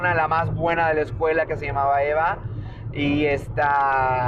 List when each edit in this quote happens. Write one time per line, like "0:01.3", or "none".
none

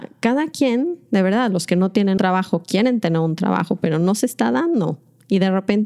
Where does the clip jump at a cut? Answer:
0:02.2

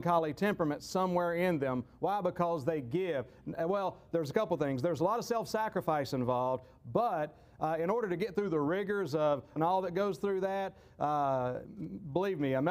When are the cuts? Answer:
0:09.6

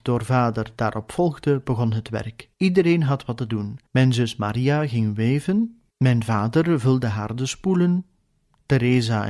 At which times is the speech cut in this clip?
0:02.5
0:03.9
0:05.9

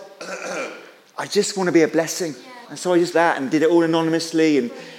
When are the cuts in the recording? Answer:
0:02.6
0:03.1

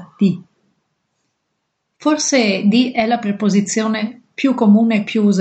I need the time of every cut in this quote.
none

